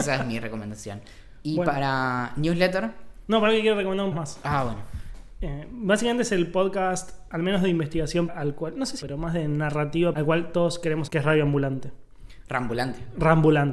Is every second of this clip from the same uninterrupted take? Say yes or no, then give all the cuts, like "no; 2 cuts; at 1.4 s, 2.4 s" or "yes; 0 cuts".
no; 5 cuts; at 4.1 s, 8.3 s, 9.0 s, 10.1 s, 11.1 s